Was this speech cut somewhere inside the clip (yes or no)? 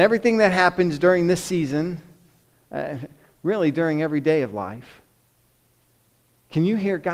no